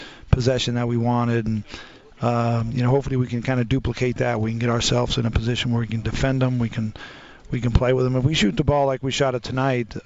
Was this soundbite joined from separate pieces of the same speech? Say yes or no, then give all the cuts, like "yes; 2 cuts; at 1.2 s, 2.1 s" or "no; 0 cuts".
no; 0 cuts